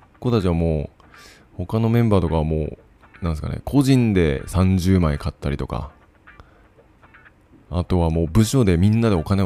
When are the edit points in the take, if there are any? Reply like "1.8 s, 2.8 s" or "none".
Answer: none